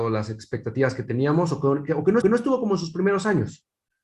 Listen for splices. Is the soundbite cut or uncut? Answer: cut